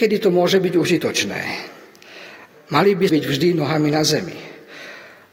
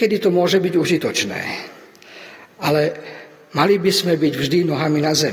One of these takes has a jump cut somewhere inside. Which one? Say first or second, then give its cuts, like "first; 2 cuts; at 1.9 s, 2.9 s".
first; 2 cuts; at 2.5 s, 3.1 s